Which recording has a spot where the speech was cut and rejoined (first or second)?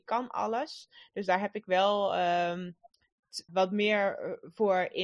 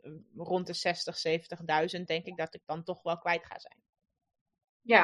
first